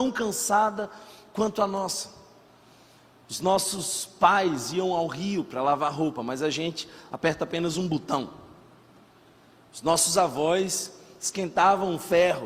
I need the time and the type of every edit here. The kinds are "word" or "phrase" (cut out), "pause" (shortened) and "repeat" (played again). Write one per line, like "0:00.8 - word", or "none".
none